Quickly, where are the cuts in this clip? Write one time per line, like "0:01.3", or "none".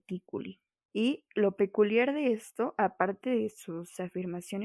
none